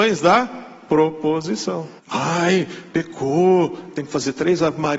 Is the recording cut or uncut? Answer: cut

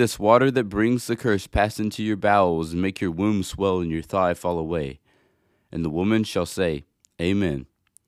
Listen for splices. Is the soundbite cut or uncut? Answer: uncut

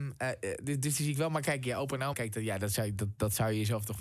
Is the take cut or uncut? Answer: cut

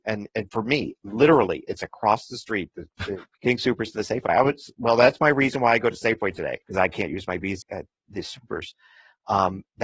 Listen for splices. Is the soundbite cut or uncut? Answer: cut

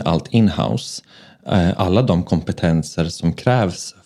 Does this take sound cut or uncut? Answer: cut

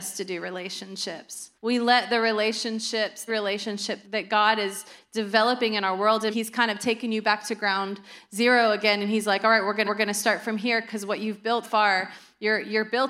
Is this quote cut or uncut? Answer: cut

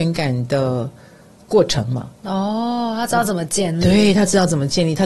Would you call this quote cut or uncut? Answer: uncut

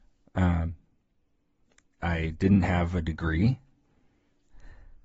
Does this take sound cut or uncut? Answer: uncut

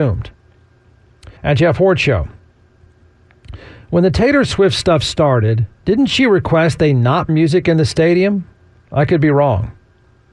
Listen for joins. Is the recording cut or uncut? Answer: cut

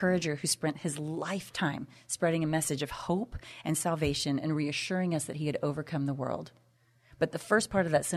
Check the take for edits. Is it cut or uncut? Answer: uncut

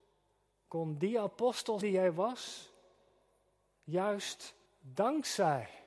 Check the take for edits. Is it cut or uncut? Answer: cut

